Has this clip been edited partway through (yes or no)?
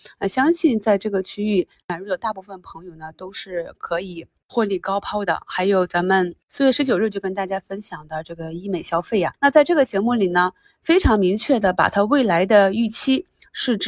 yes